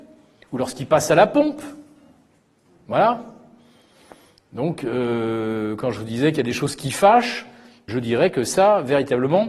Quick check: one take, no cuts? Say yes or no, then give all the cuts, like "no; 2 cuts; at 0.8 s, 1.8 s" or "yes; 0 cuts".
no; 1 cut; at 7.9 s